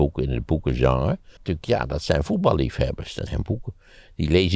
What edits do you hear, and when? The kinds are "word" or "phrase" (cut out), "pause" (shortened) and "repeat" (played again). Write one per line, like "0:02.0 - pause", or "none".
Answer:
0:01.4 - word
0:03.3 - word

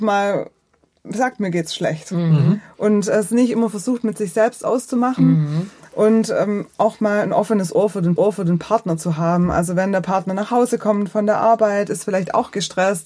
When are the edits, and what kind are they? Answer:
0:08.2 - repeat

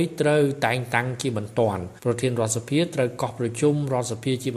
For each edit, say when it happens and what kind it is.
0:02.0 - pause

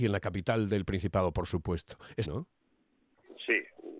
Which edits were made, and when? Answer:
0:02.2 - word

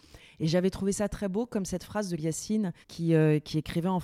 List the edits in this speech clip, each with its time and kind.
0:01.1 - word
0:02.2 - word
0:02.8 - pause

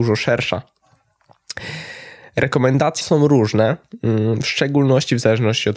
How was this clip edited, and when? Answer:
0:03.0 - phrase

